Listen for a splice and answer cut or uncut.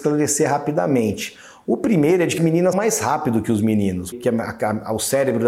cut